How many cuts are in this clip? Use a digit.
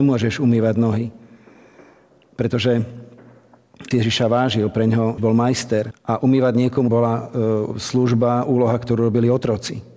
4